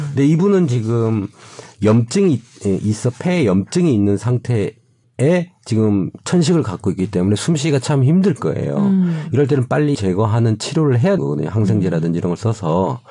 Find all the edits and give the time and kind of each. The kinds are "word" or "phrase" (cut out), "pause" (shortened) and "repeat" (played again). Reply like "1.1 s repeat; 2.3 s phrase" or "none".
5.0 s pause; 9.9 s word; 11.2 s word